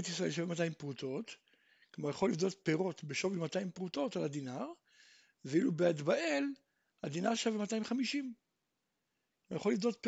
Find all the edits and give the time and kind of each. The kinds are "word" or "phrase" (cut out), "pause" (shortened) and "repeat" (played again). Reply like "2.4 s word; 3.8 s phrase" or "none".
none